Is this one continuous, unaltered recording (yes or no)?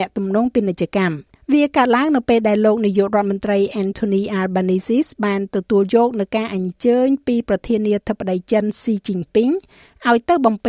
no